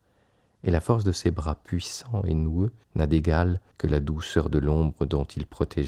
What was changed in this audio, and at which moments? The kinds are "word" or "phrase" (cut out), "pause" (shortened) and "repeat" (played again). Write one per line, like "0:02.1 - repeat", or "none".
0:02.8 - pause
0:03.7 - pause